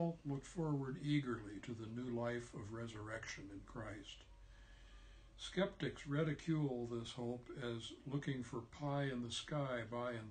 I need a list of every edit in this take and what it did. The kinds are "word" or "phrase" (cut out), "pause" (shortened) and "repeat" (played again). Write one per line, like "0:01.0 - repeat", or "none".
none

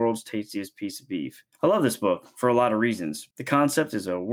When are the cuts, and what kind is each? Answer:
0:01.5 - pause
0:03.3 - pause

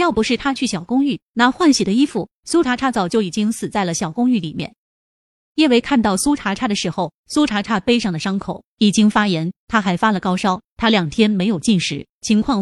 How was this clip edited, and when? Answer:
none

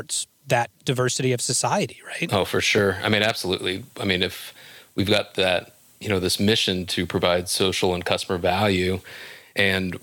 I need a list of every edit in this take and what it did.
none

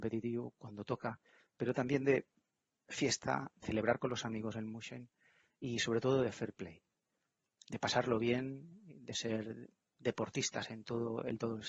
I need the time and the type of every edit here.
0:03.6 - word

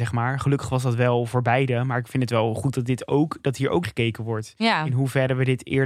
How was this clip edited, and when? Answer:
0:03.8 - word

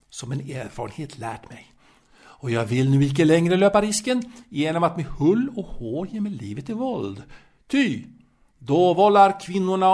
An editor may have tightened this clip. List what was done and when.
none

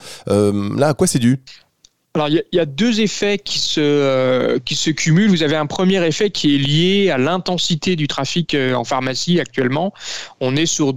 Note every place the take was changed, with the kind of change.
none

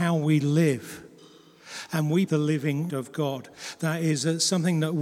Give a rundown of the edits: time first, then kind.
0:02.3 - word
0:02.9 - word

